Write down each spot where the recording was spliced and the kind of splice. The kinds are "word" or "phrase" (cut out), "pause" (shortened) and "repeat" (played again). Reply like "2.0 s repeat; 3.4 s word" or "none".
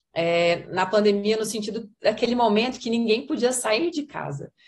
none